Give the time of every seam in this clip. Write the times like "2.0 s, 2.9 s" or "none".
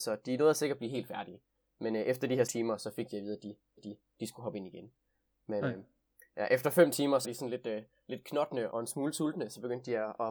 2.5 s, 3.8 s, 7.2 s, 8.7 s